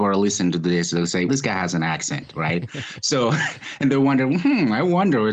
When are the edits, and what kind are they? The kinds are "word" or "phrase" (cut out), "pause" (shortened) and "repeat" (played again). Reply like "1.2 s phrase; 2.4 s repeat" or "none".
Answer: 1.3 s word